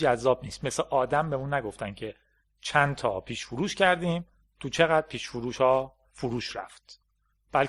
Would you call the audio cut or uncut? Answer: uncut